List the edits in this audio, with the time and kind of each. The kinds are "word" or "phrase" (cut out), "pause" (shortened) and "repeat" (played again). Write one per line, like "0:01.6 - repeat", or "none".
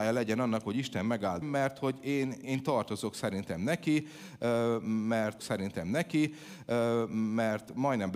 0:01.4 - word
0:02.4 - word
0:05.4 - repeat